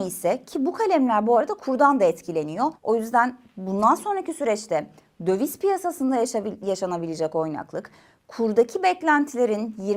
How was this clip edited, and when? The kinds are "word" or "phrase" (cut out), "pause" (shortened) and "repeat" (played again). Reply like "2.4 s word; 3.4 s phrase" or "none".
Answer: 2.8 s pause